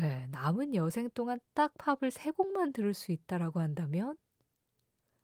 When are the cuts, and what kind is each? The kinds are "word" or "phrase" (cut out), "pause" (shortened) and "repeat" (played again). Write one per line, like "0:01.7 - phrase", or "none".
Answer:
none